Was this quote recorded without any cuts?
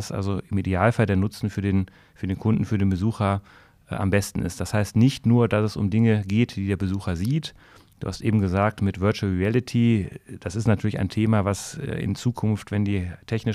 yes; 0 cuts

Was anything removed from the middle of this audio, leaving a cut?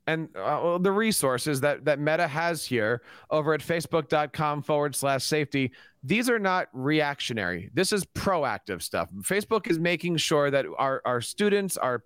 no; 0 cuts

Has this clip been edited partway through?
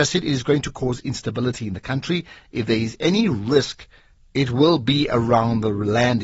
yes; 1 cut; at 4.2 s

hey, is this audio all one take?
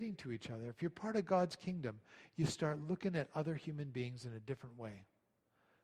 yes; 0 cuts

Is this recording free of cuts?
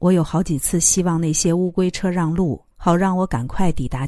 no; 1 cut; at 2.7 s

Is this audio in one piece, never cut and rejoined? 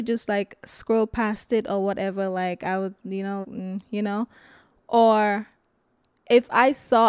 no; 1 cut; at 3.4 s

